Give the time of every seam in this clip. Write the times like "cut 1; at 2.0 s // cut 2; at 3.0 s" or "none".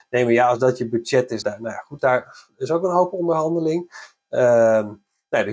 cut 1; at 1.4 s // cut 2; at 2.0 s